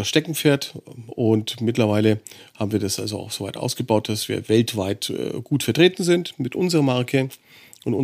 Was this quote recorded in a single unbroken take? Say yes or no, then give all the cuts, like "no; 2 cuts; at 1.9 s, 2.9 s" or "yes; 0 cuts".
yes; 0 cuts